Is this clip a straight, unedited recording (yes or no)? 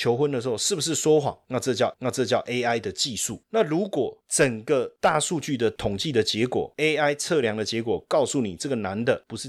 no